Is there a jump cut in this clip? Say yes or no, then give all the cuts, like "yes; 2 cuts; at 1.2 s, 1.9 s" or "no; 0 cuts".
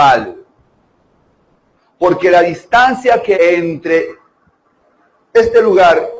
yes; 1 cut; at 3.3 s